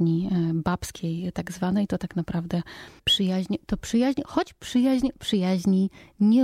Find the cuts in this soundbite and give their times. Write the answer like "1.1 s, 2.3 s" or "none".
3.0 s